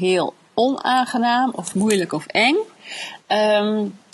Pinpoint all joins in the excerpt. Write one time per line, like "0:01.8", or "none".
none